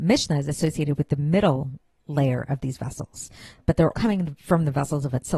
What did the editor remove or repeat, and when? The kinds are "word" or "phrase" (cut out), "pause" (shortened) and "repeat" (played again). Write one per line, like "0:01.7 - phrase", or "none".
0:03.9 - word